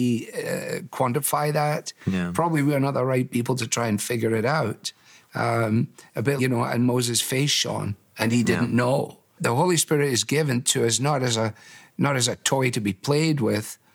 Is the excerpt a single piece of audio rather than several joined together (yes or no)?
no